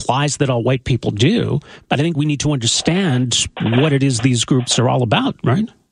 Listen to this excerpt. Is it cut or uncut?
uncut